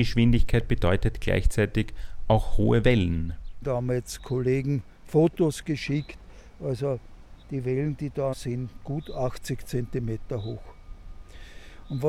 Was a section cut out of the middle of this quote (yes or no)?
yes